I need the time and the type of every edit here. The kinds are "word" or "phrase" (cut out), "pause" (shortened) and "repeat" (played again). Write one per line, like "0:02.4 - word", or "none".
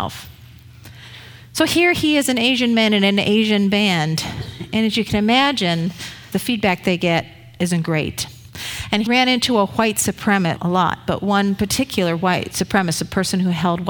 0:06.3 - word
0:09.1 - word
0:10.6 - word